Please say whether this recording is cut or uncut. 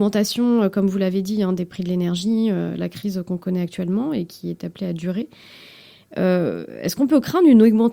uncut